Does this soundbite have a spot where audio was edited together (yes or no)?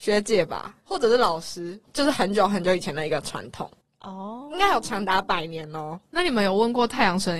no